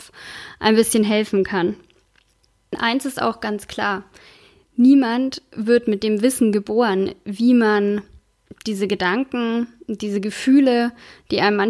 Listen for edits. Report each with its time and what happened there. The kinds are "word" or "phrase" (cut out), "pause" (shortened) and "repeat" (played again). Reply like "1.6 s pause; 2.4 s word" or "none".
none